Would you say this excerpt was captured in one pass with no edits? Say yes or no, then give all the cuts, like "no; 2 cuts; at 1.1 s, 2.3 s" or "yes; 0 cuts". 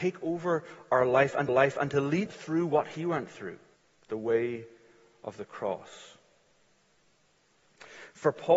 no; 3 cuts; at 1.5 s, 2.3 s, 3.8 s